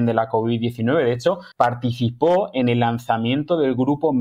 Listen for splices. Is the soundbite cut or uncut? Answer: cut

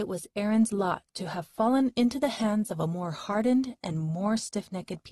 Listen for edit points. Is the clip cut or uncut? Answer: uncut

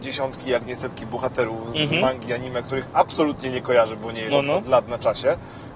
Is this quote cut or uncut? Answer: cut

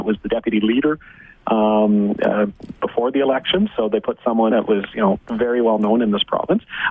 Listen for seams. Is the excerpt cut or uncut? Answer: cut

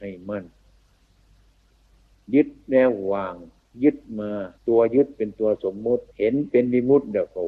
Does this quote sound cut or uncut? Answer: cut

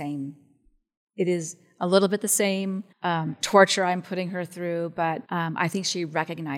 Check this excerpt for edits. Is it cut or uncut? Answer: cut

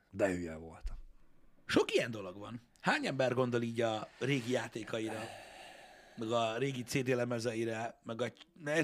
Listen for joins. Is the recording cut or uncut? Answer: uncut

